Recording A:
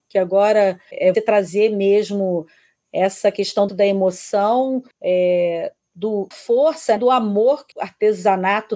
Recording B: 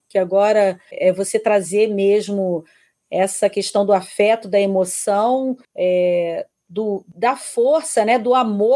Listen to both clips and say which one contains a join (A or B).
A